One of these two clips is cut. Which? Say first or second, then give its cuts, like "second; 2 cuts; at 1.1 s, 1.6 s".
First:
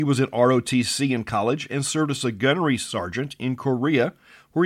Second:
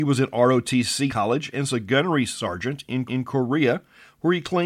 second; 3 cuts; at 1.1 s, 1.7 s, 3.1 s